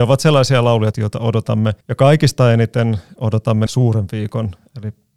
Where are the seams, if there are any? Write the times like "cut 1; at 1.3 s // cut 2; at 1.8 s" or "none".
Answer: cut 1; at 0.9 s // cut 2; at 1.8 s // cut 3; at 3.7 s